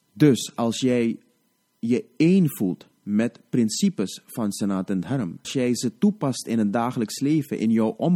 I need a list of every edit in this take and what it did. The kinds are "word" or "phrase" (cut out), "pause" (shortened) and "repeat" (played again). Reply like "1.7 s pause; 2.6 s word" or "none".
5.4 s word

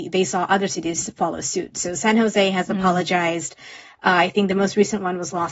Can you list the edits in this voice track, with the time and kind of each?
none

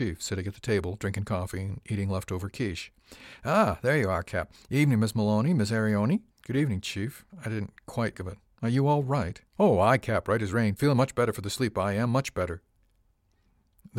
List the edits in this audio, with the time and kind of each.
6.3 s pause; 7.3 s pause; 8.1 s phrase; 9.5 s pause

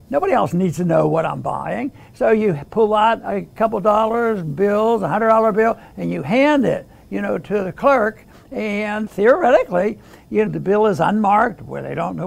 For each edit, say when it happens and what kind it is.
9.1 s word; 10.5 s word

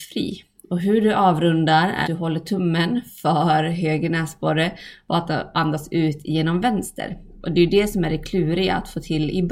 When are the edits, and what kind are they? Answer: 2.0 s word

